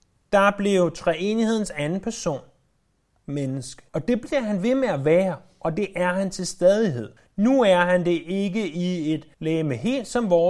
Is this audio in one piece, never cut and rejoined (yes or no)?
no